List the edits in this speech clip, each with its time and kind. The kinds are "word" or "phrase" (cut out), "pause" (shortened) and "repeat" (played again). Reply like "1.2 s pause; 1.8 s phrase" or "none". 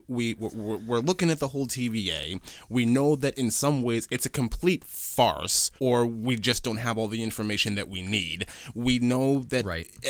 5.8 s pause